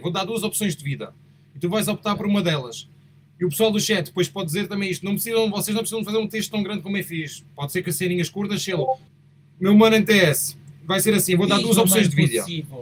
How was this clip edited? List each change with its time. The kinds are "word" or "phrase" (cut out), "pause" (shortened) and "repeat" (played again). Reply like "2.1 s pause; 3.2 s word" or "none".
none